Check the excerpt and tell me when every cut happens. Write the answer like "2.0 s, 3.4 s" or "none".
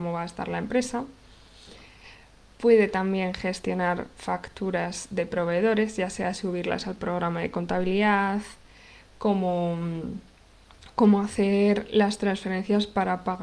none